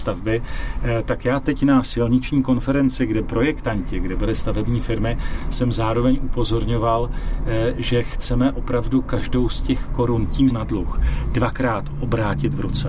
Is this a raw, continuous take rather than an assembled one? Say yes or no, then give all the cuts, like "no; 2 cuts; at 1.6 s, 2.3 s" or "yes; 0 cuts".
no; 2 cuts; at 3.2 s, 10.5 s